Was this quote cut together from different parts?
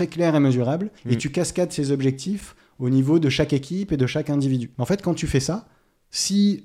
yes; 2 cuts; at 1.0 s, 4.7 s

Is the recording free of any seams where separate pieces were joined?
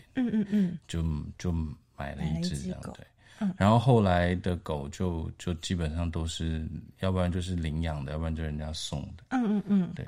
yes; 0 cuts

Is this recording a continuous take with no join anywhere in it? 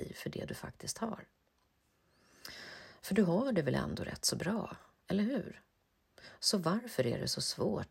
yes; 0 cuts

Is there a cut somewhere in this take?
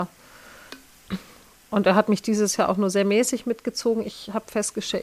no; 0 cuts

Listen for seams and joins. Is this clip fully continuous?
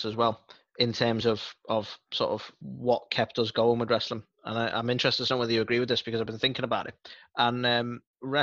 yes; 0 cuts

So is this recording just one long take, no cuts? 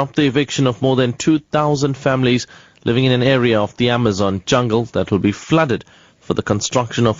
yes; 0 cuts

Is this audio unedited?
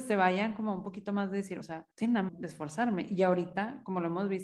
no; 3 cuts; at 1.6 s, 1.9 s, 2.3 s

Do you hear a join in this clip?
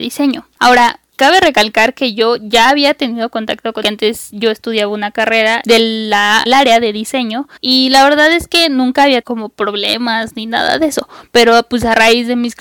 yes; 5 cuts; at 3.8 s, 5.6 s, 6.5 s, 7.6 s, 9.2 s

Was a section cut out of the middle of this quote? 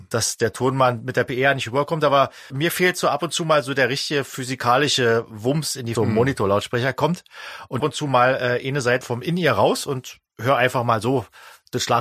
yes; 4 cuts; at 2.5 s, 5.9 s, 7.8 s, 9.0 s

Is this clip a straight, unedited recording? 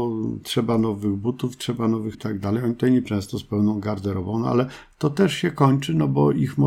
no; 2 cuts; at 2.1 s, 3.0 s

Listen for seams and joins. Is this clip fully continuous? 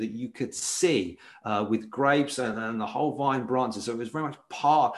yes; 0 cuts

